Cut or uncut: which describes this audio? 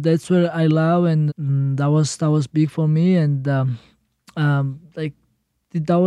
cut